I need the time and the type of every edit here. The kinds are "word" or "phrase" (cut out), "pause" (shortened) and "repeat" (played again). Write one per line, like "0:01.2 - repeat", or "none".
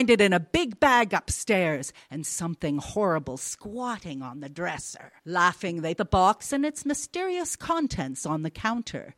0:05.2 - pause
0:06.0 - word